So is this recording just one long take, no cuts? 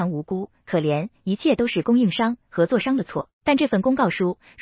no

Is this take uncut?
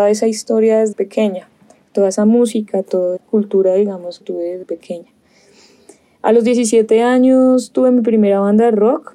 no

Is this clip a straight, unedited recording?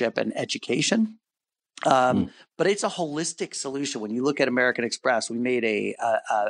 yes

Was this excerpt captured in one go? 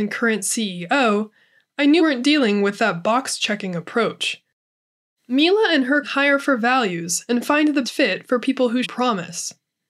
no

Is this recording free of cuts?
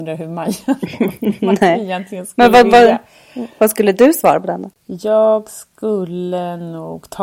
yes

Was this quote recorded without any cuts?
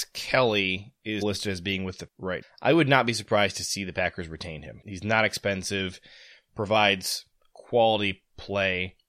no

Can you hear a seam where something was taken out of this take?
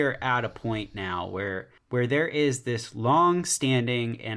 yes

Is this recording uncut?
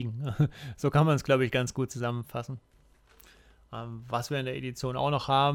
yes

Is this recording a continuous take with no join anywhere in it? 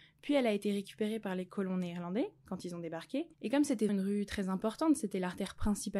no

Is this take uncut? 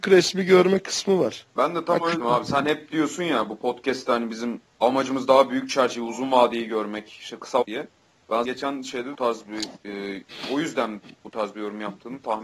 no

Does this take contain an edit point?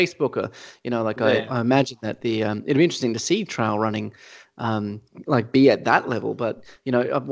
no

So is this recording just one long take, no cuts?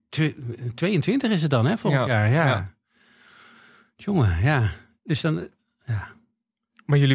yes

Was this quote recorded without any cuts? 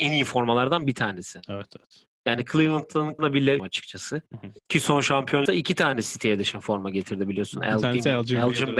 no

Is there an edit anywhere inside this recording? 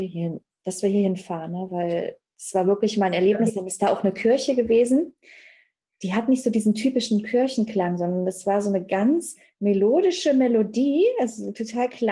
no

